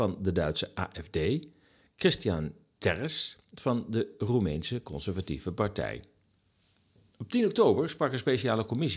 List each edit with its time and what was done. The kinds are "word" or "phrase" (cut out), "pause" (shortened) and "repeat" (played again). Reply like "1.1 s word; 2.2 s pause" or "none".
none